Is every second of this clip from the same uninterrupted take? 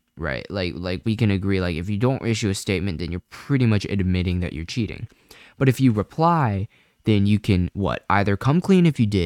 yes; 0 cuts

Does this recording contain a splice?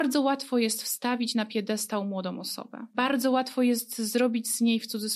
no; 0 cuts

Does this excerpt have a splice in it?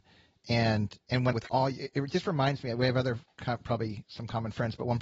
yes; 1 cut; at 1.3 s

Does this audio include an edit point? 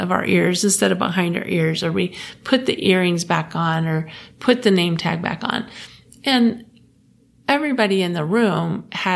no; 0 cuts

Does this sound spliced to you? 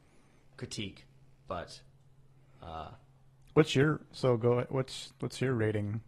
no; 0 cuts

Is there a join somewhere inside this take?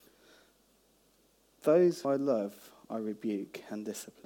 yes; 1 cut; at 2.0 s

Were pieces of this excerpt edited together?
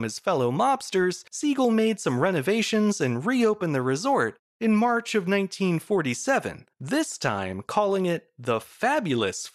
yes; 2 cuts; at 1.3 s, 6.7 s

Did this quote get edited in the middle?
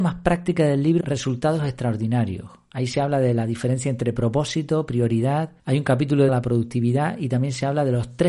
yes; 3 cuts; at 1.0 s, 5.6 s, 6.3 s

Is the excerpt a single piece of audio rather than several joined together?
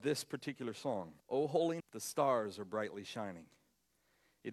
no; 2 cuts; at 1.2 s, 1.8 s

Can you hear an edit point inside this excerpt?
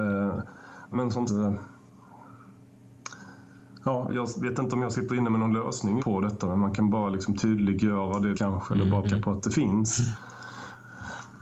yes; 6 cuts; at 0.9 s, 1.3 s, 4.1 s, 6.0 s, 8.3 s, 9.0 s

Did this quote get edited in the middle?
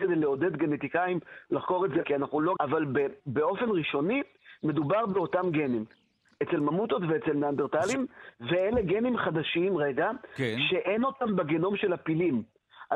yes; 3 cuts; at 2.0 s, 2.6 s, 3.2 s

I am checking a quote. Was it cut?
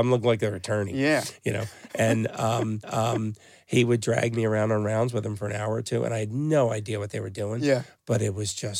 yes; 1 cut; at 2.8 s

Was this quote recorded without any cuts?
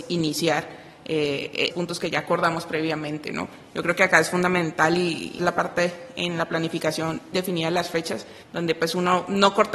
no; 4 cuts; at 1.7 s, 5.4 s, 7.3 s, 8.4 s

